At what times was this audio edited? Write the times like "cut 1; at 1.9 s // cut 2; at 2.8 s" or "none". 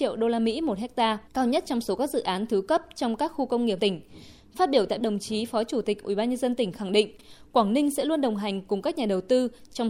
cut 1; at 1.3 s // cut 2; at 3.8 s // cut 3; at 5.0 s